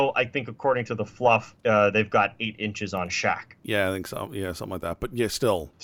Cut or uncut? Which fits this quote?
uncut